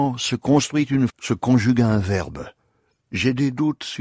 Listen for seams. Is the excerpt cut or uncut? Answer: cut